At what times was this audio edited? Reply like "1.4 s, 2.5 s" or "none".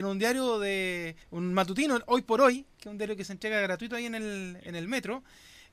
1.2 s